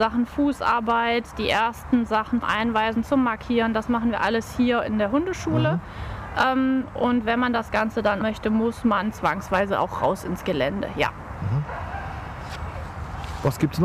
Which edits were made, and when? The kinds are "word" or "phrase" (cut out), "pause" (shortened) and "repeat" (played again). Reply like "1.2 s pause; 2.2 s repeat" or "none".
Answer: 2.4 s word; 8.2 s phrase